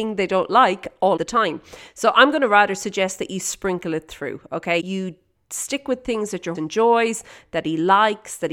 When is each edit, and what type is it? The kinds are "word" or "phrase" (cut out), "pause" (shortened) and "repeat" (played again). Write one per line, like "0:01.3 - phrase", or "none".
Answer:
0:01.2 - word
0:04.8 - word
0:06.5 - word